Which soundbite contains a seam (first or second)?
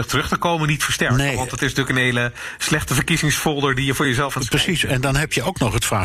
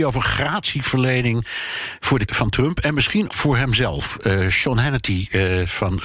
second